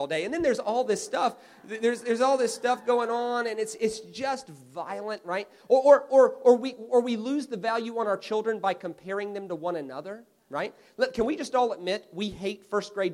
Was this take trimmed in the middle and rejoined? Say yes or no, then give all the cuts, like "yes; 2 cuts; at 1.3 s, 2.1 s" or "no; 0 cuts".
no; 0 cuts